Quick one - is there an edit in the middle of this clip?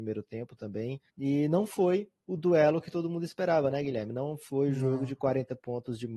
yes; 1 cut; at 1.1 s

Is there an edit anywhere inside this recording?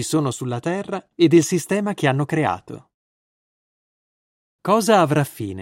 no; 0 cuts

